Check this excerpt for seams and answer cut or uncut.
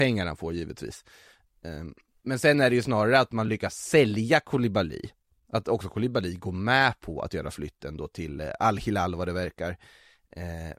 uncut